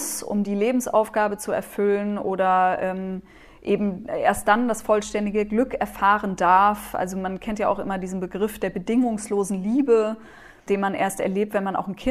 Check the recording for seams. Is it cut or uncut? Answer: uncut